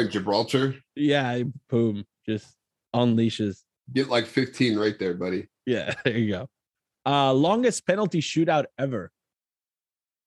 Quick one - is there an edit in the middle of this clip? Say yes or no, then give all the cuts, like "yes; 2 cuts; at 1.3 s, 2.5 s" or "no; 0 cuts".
yes; 1 cut; at 1.6 s